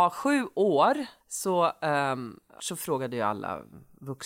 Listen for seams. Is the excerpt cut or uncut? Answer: cut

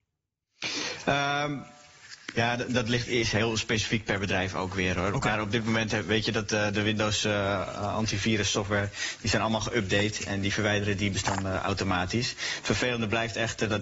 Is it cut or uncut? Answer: uncut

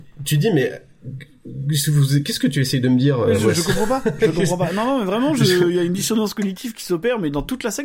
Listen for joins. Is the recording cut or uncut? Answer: uncut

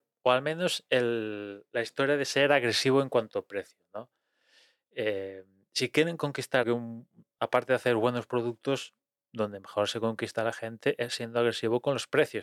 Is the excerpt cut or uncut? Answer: cut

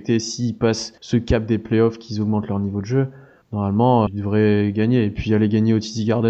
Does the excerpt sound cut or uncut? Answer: cut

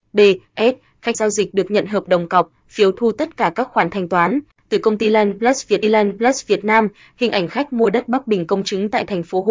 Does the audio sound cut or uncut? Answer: cut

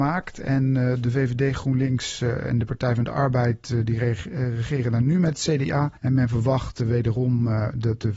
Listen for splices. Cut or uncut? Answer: cut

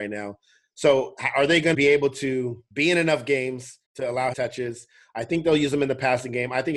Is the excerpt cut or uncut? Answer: cut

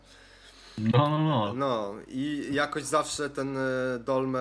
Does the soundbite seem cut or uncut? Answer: uncut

